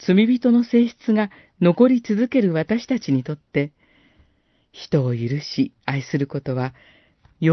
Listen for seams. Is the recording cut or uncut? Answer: cut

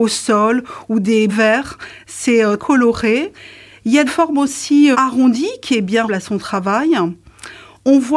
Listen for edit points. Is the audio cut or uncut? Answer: cut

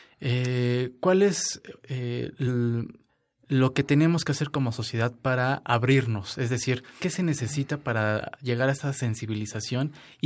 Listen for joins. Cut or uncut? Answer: cut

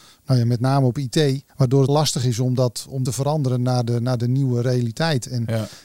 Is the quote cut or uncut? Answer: cut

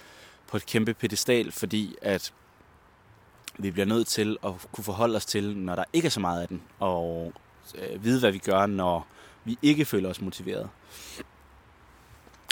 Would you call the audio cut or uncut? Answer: uncut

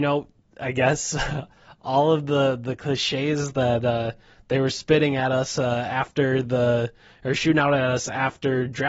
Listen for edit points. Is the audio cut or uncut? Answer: uncut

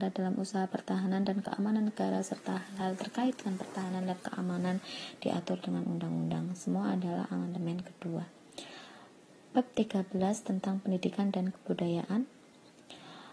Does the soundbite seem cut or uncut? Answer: uncut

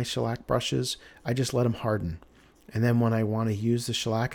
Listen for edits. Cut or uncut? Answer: uncut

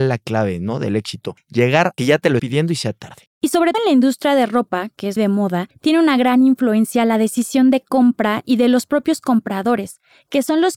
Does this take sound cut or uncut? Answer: cut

